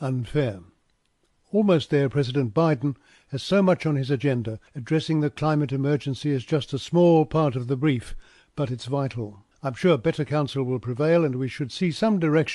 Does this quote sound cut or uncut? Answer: cut